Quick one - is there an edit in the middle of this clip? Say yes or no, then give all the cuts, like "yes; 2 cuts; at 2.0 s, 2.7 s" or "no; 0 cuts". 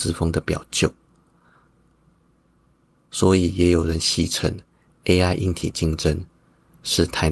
no; 0 cuts